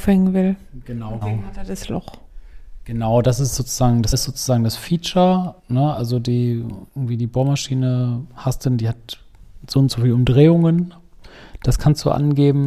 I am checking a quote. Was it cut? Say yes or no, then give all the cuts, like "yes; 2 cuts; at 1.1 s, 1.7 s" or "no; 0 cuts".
yes; 4 cuts; at 1.2 s, 4.1 s, 5.6 s, 6.9 s